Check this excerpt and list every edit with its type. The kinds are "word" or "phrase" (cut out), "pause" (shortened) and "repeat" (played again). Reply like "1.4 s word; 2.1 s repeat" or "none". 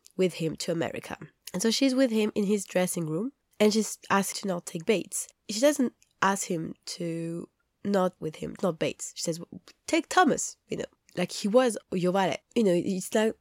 4.3 s word; 8.2 s phrase; 8.6 s word